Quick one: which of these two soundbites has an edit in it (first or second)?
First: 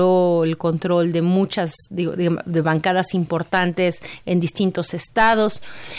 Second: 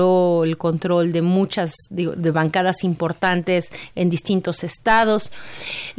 second